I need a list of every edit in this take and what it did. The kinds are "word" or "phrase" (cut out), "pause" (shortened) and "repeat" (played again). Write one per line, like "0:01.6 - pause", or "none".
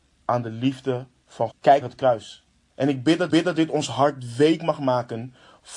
0:01.5 - word
0:01.8 - word
0:02.7 - pause
0:03.3 - repeat